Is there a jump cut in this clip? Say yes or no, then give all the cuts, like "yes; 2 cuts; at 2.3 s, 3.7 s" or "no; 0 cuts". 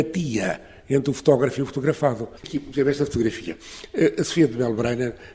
yes; 1 cut; at 2.4 s